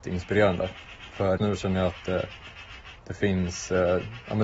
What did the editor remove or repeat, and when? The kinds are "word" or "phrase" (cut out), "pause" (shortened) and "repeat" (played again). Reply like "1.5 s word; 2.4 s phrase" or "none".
1.4 s word; 3.0 s pause